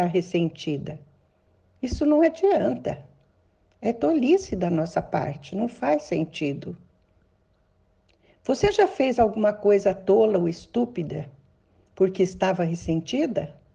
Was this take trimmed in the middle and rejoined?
no; 0 cuts

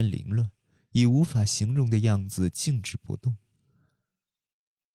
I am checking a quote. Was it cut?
no; 0 cuts

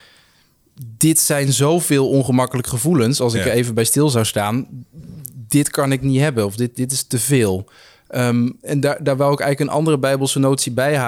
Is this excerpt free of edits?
yes; 0 cuts

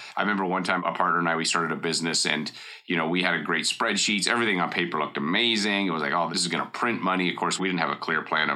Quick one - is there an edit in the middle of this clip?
no; 0 cuts

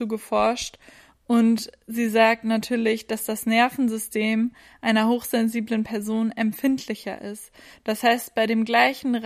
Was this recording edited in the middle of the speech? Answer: no; 0 cuts

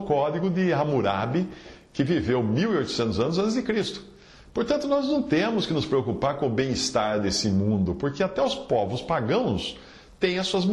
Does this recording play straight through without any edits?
yes; 0 cuts

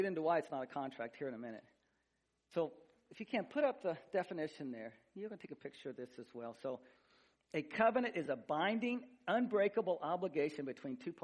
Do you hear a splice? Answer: no; 0 cuts

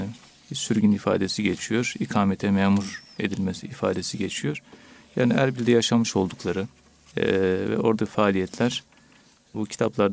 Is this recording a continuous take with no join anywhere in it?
no; 1 cut; at 8.0 s

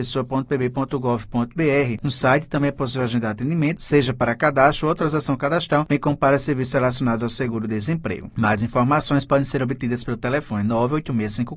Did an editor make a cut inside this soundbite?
no; 0 cuts

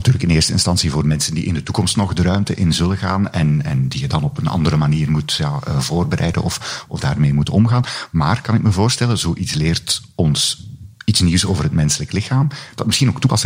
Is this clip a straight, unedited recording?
yes; 0 cuts

